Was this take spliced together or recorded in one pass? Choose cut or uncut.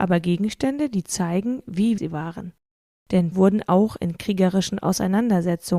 cut